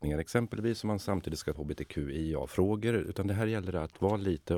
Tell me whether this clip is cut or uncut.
cut